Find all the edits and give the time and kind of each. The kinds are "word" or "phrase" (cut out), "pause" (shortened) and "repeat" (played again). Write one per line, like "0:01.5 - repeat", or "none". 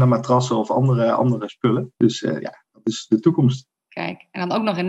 0:02.0 - pause
0:03.8 - pause